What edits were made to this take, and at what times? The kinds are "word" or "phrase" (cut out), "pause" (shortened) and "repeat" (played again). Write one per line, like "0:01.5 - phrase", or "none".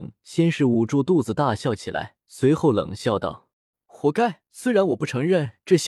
0:02.2 - pause
0:03.5 - pause
0:04.4 - pause